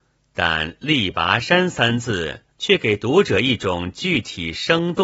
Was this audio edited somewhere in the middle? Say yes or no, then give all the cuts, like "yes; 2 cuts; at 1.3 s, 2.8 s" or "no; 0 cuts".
yes; 1 cut; at 2.5 s